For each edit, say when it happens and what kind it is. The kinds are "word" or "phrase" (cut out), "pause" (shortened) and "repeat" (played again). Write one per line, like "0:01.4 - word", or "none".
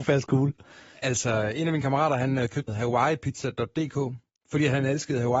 0:02.7 - word